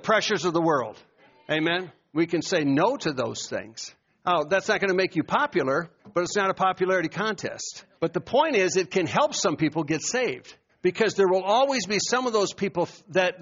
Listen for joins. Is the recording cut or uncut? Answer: cut